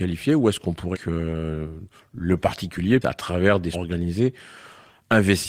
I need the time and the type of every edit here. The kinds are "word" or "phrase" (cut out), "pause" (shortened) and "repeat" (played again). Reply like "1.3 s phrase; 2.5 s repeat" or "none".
0.9 s word; 3.0 s word; 3.7 s word